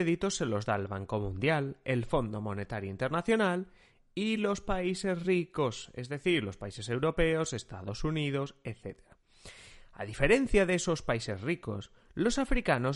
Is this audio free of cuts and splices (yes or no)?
yes